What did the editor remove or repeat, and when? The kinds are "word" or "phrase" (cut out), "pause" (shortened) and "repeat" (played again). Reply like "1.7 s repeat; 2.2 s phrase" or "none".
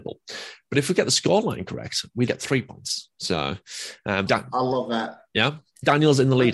2.3 s word; 4.3 s phrase